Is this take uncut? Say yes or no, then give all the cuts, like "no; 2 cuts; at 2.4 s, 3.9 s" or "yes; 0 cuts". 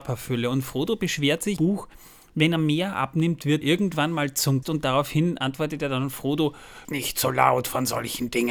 no; 4 cuts; at 1.6 s, 3.6 s, 4.6 s, 6.8 s